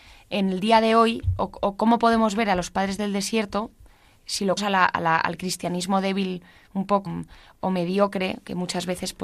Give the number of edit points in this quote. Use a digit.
3